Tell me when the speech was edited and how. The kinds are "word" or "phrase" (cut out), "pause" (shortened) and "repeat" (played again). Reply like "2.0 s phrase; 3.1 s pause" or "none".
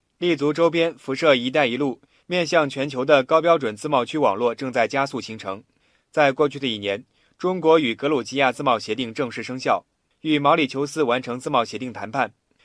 none